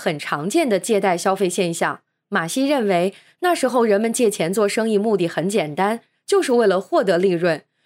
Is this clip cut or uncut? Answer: uncut